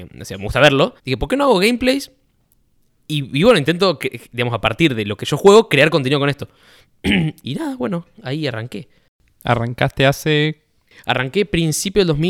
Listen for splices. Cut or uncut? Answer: cut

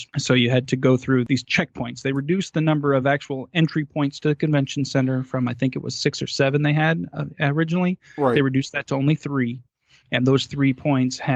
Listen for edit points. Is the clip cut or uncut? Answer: uncut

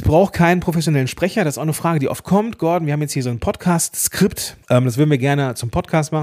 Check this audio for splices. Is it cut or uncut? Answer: cut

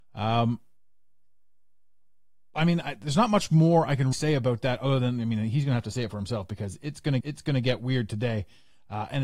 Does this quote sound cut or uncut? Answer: cut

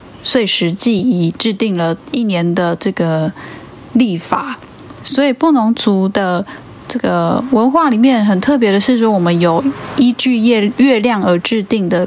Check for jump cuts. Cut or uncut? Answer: uncut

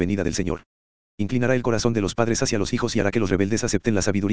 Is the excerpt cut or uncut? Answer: uncut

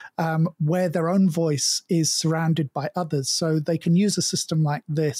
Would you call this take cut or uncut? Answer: uncut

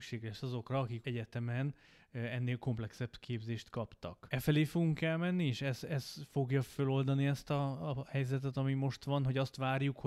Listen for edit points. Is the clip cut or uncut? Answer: uncut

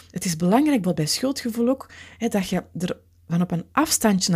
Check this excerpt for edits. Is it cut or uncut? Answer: uncut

